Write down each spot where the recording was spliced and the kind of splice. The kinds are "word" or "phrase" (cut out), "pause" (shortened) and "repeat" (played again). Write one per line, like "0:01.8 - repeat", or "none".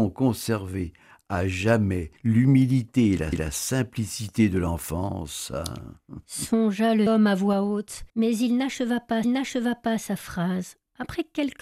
0:02.2 - pause
0:03.3 - repeat
0:07.1 - word
0:08.1 - pause
0:09.2 - repeat